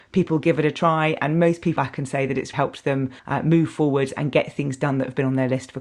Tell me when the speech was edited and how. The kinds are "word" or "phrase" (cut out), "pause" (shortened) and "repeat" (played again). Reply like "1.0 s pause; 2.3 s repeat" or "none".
1.8 s phrase; 2.5 s word; 3.2 s pause